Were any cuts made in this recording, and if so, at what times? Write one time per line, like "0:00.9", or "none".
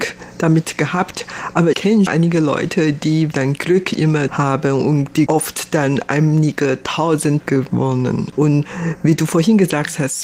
0:01.7
0:02.1
0:03.3
0:04.3
0:05.3
0:07.4